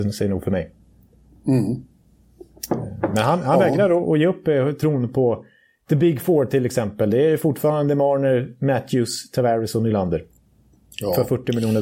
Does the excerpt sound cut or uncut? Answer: uncut